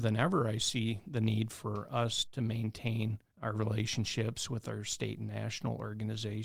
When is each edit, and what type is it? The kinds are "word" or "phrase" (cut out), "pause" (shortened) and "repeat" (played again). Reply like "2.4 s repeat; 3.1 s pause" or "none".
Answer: 2.3 s word